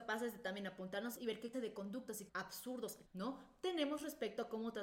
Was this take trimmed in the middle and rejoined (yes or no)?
yes